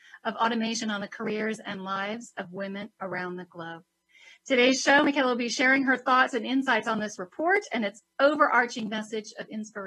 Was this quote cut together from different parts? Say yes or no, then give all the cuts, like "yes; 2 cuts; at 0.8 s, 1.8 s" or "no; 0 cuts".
no; 0 cuts